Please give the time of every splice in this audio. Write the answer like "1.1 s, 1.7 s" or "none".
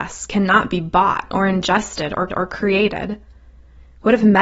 2.3 s

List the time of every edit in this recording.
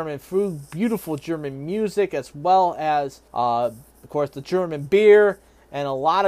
3.3 s

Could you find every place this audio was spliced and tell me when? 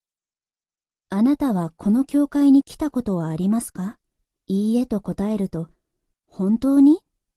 4.2 s

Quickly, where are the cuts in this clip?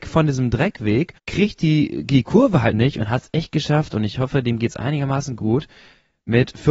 1.2 s, 2.7 s

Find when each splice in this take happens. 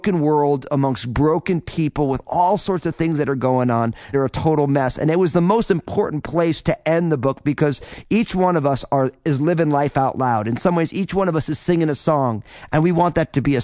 4.1 s

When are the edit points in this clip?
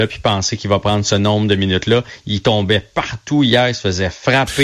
none

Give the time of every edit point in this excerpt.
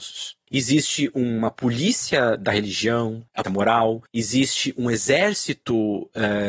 3.4 s

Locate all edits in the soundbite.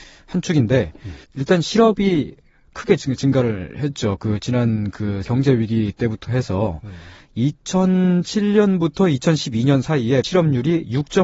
1.2 s, 5.2 s, 10.2 s

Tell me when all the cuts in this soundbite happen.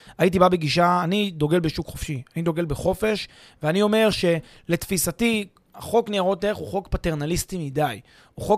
none

